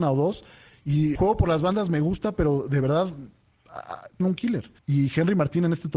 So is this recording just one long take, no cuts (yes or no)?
no